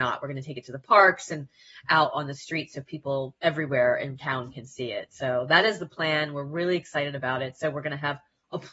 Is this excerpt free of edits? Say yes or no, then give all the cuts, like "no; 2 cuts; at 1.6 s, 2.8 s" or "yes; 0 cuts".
no; 1 cut; at 3.4 s